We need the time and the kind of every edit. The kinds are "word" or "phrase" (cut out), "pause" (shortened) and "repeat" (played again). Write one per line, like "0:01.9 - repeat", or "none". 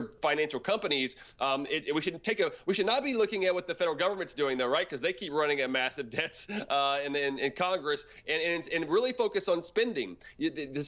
none